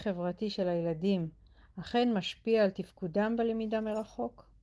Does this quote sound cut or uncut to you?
uncut